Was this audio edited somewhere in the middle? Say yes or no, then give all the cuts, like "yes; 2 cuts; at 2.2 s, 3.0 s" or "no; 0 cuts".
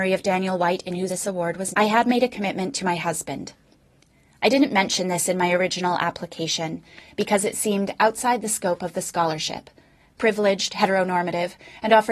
yes; 2 cuts; at 1.1 s, 1.7 s